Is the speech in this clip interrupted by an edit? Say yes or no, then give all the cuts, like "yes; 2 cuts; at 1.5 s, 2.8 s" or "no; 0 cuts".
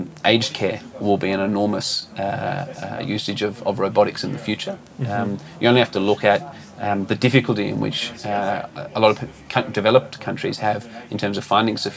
no; 0 cuts